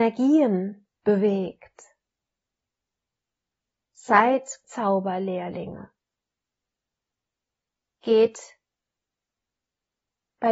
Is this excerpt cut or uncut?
cut